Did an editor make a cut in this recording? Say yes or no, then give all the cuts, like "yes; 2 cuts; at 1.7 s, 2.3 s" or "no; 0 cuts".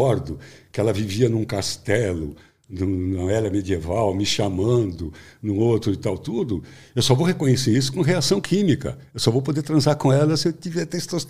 no; 0 cuts